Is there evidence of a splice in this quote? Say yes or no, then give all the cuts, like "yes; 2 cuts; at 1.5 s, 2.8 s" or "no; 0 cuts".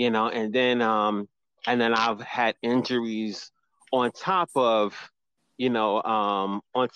no; 0 cuts